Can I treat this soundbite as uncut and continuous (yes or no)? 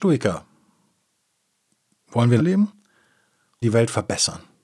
no